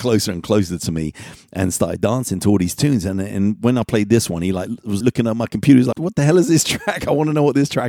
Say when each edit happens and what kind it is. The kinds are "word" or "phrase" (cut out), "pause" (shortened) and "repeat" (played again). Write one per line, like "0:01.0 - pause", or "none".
0:05.0 - word
0:05.9 - word